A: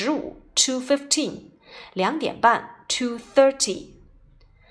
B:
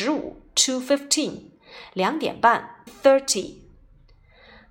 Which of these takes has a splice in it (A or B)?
B